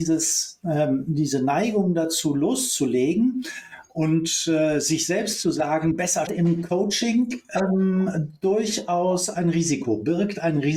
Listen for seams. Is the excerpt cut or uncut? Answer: cut